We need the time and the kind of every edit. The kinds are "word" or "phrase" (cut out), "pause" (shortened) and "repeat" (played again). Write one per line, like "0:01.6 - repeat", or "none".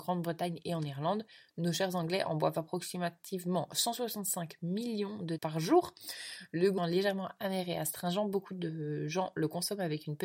0:05.4 - word
0:06.8 - word